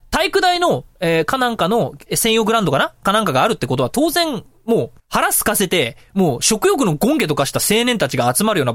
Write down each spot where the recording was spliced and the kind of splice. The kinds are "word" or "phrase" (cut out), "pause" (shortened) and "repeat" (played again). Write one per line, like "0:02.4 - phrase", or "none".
0:05.0 - pause